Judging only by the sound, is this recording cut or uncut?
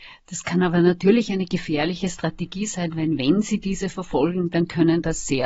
uncut